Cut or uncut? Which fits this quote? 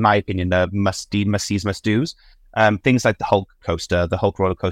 uncut